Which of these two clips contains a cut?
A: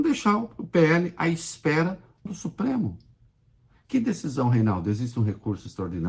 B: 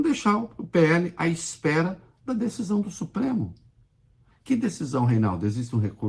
A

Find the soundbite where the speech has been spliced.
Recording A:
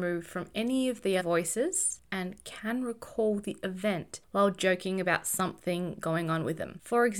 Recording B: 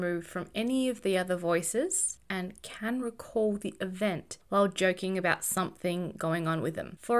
A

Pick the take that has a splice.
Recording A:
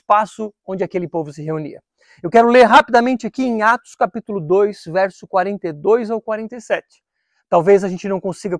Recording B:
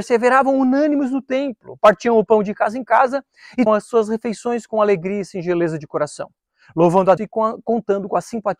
B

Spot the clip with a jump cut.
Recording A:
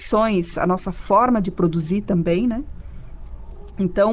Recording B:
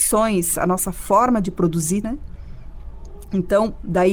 B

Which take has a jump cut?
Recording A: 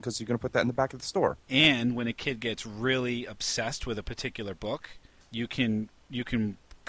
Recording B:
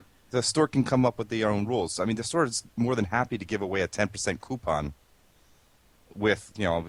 A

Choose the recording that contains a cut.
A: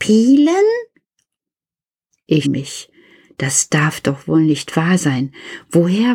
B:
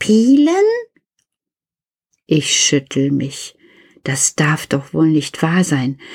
A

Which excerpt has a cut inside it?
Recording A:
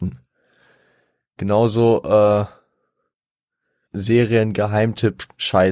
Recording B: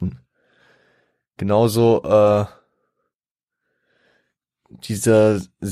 A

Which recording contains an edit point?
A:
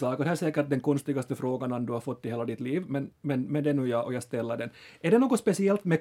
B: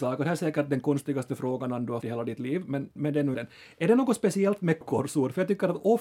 B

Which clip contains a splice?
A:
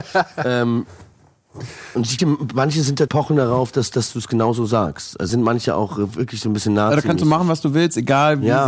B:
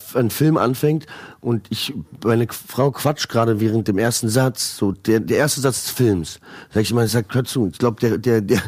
A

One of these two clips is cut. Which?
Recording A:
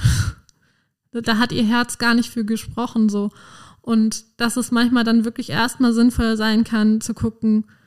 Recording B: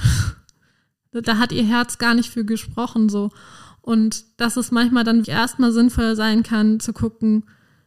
B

